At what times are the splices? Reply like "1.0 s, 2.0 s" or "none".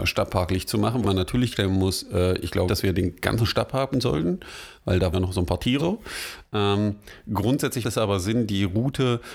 1.0 s, 1.5 s, 2.7 s, 3.9 s, 5.1 s, 5.8 s, 7.8 s